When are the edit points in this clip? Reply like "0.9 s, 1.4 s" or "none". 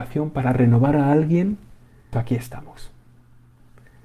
2.1 s